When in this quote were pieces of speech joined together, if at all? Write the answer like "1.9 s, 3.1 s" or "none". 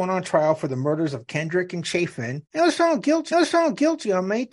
2.5 s, 3.3 s